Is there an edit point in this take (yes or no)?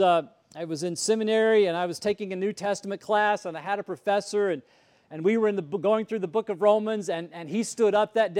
no